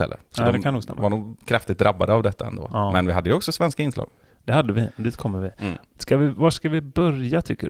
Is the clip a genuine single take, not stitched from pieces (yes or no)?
yes